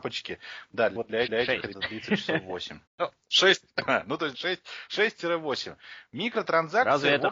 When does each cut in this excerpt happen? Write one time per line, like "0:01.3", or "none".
0:01.0
0:01.3
0:01.7
0:02.9
0:04.3